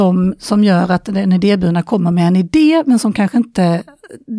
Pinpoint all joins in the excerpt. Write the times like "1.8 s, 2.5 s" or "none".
none